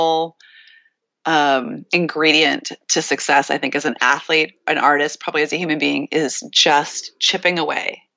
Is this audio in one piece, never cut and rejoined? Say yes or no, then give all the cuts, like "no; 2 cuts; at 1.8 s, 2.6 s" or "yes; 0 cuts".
yes; 0 cuts